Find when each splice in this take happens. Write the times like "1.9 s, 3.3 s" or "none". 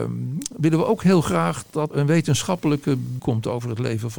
1.9 s, 3.2 s